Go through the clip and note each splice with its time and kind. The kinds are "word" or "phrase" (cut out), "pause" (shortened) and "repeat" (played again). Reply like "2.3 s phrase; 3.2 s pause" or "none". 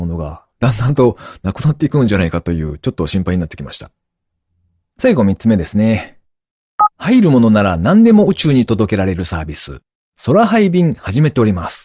6.9 s pause